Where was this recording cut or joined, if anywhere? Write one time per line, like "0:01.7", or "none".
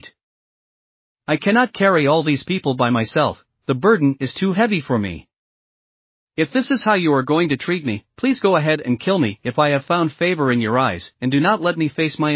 none